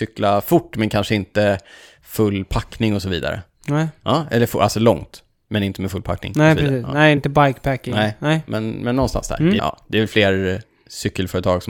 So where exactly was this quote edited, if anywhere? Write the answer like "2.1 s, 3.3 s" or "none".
7.2 s, 9.6 s